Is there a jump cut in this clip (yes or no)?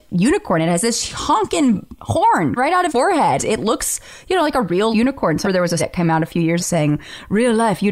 yes